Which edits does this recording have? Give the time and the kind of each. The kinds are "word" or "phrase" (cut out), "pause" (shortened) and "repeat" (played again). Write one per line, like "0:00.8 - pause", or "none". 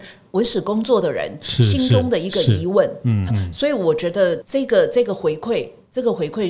0:03.3 - word